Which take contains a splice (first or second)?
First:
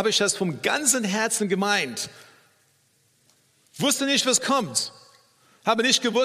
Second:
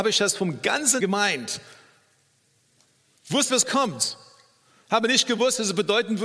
second